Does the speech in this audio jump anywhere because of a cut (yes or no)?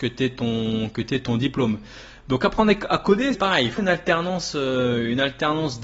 yes